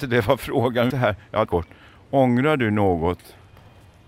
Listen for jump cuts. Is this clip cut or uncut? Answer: cut